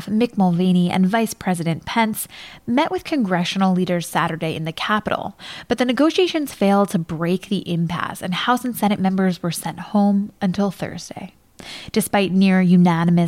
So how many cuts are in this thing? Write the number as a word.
zero